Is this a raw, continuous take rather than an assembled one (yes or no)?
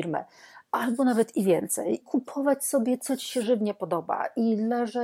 no